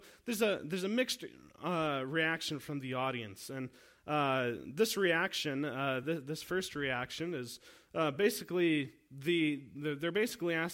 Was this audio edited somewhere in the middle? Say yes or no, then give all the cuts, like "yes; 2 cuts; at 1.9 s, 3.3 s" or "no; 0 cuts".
no; 0 cuts